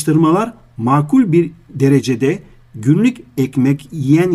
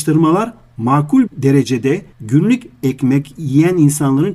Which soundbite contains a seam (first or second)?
second